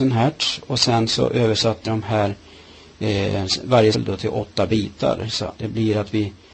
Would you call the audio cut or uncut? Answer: cut